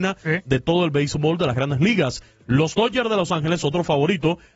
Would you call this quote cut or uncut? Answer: uncut